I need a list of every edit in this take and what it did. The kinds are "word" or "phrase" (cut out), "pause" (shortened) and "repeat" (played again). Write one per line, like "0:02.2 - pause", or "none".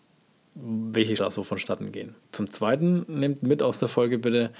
0:01.2 - word
0:02.2 - pause